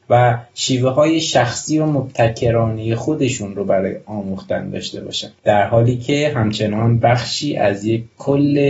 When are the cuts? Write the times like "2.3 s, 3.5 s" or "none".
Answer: none